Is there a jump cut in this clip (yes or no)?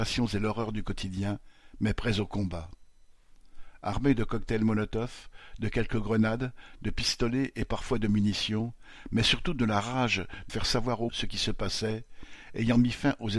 yes